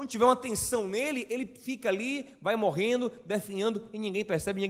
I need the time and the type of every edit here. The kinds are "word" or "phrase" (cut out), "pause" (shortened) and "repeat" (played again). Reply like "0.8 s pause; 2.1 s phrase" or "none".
none